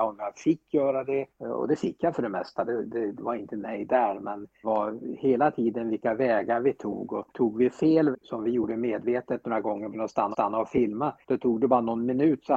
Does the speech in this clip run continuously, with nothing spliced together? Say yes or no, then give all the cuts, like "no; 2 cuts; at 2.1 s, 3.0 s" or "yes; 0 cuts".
no; 8 cuts; at 1.3 s, 3.2 s, 4.6 s, 7.3 s, 8.1 s, 9.9 s, 10.3 s, 11.2 s